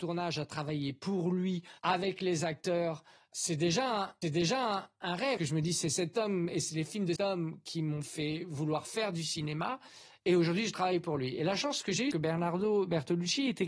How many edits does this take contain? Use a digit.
6